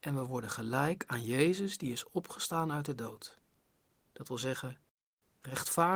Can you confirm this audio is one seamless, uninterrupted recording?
yes; 0 cuts

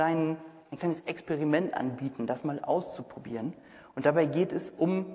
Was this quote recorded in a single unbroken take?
yes; 0 cuts

